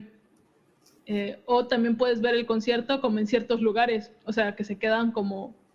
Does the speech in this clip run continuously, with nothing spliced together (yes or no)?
yes